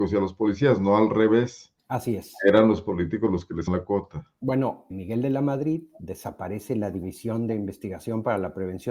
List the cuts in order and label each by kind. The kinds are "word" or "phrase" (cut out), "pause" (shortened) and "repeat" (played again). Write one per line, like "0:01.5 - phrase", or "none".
0:01.8 - pause
0:03.7 - word
0:04.9 - word